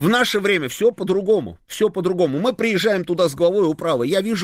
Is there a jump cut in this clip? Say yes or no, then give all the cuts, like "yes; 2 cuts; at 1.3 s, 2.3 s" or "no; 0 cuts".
no; 0 cuts